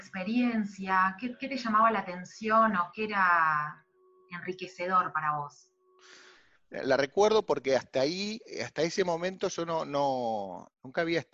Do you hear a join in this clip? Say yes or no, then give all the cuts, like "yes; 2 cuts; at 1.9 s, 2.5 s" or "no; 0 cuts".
no; 0 cuts